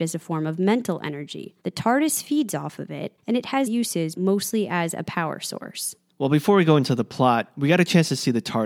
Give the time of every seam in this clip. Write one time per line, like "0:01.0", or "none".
0:01.6
0:03.2
0:03.7
0:04.1